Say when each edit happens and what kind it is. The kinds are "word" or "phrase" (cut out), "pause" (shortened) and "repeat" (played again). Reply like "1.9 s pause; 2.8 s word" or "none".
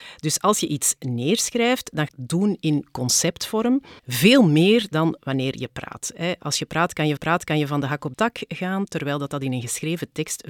2.1 s phrase; 4.0 s pause; 7.2 s repeat; 8.1 s word